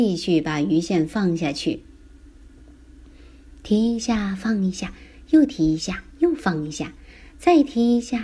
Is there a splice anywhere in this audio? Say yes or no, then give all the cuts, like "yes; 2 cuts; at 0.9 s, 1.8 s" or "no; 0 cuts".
no; 0 cuts